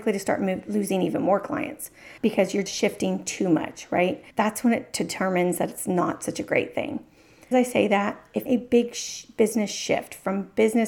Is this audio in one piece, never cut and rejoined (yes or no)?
no